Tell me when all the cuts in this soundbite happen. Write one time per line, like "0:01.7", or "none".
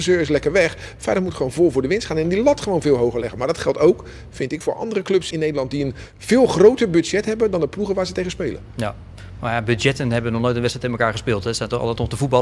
0:04.6
0:05.3